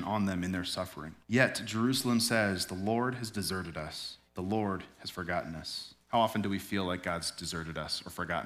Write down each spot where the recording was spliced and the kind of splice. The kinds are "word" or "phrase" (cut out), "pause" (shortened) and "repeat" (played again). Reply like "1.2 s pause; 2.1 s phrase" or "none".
1.2 s pause; 4.3 s pause; 6.0 s pause

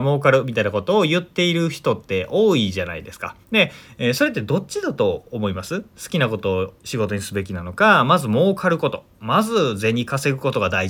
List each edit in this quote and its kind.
3.4 s pause; 6.8 s pause

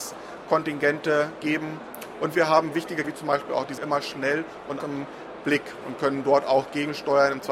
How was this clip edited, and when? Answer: 3.0 s word; 3.8 s word; 4.8 s word

